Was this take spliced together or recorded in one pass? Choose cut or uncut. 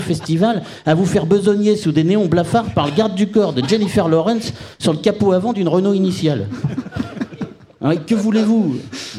uncut